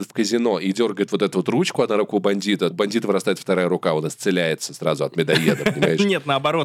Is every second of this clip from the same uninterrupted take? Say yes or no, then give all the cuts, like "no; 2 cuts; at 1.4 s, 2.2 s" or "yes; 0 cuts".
no; 1 cut; at 2.7 s